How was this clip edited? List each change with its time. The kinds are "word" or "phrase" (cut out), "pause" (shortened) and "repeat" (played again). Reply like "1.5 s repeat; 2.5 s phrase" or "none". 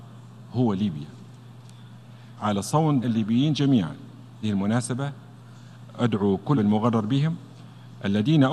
2.4 s phrase; 3.0 s word; 4.4 s word; 6.6 s word